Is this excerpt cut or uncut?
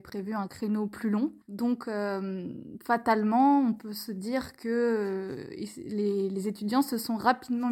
cut